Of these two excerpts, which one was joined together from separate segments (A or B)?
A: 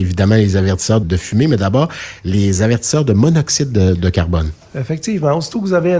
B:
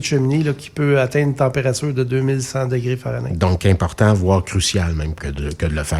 A